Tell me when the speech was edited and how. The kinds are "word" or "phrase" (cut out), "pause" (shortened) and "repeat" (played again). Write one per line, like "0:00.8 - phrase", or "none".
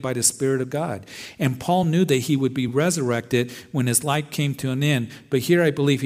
none